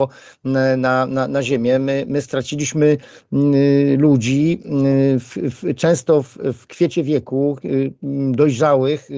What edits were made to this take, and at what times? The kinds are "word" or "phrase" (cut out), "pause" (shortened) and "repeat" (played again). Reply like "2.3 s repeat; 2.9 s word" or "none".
none